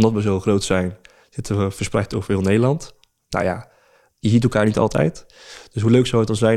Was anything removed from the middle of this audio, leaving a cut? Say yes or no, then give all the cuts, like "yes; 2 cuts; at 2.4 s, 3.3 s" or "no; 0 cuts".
no; 0 cuts